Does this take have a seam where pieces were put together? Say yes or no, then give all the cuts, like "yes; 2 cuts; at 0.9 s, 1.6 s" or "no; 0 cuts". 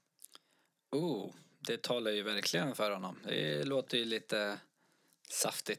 no; 0 cuts